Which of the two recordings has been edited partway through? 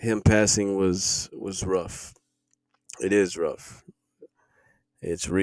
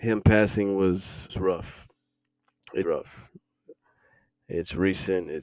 second; 2 cuts; at 1.3 s, 2.8 s

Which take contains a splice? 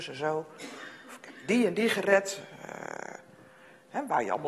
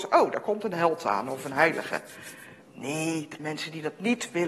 second; 2 cuts; at 2.6 s, 3.4 s

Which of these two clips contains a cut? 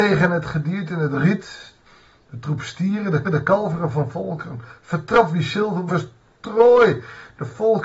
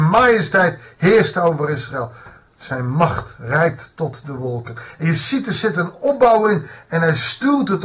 first; 3 cuts; at 1.8 s, 3.2 s, 5.9 s

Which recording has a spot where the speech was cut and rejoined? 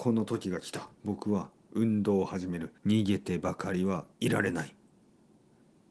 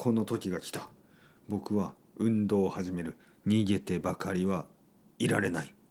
first; 3 cuts; at 0.9 s, 2.8 s, 4.1 s

